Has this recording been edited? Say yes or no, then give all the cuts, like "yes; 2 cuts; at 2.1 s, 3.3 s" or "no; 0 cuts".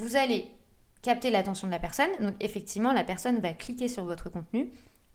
no; 0 cuts